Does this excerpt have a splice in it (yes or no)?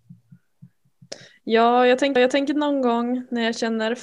yes